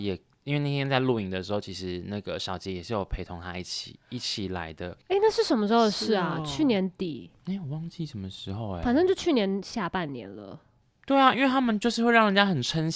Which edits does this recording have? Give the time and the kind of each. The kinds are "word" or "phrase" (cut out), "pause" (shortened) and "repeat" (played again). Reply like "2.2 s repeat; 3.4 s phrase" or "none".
none